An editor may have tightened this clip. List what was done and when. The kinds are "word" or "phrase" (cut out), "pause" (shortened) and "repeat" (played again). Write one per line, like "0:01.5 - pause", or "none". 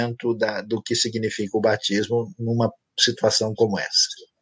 none